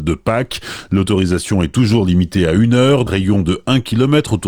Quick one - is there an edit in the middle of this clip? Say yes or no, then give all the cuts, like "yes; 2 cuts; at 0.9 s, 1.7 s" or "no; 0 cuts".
yes; 1 cut; at 3.1 s